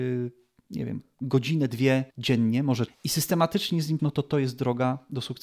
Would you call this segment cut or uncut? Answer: cut